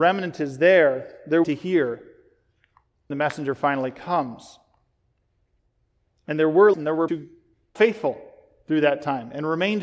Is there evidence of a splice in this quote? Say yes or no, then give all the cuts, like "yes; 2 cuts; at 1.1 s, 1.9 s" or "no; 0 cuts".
yes; 5 cuts; at 1.4 s, 3.1 s, 6.7 s, 7.1 s, 7.8 s